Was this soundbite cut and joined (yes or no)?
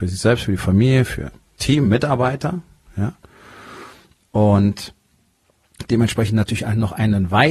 no